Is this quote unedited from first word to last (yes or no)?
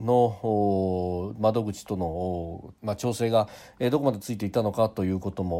no